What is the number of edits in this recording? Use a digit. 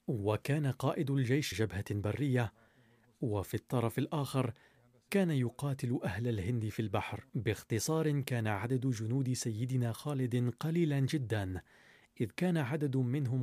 2